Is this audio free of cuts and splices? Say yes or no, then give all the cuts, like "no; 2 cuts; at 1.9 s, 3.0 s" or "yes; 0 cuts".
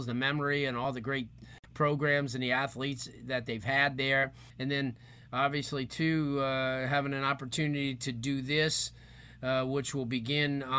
no; 1 cut; at 4.5 s